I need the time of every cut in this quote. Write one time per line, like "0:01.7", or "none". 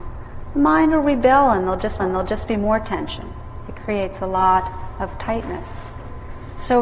0:02.0